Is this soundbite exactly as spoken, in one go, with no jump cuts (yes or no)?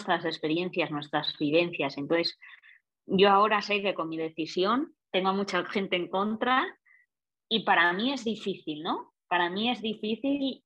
no